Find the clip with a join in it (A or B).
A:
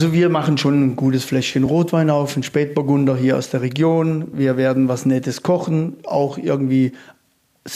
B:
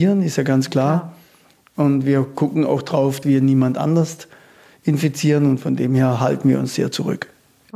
B